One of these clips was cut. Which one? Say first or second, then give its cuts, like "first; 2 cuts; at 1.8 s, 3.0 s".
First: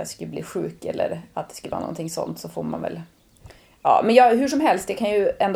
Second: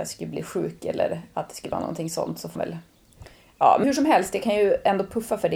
second; 2 cuts; at 2.6 s, 3.8 s